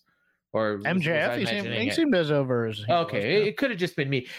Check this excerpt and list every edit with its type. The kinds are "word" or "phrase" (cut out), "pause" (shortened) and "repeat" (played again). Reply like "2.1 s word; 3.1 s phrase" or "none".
none